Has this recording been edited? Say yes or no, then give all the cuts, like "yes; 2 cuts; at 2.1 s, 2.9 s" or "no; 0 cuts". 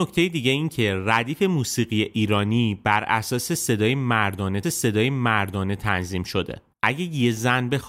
yes; 2 cuts; at 4.6 s, 6.7 s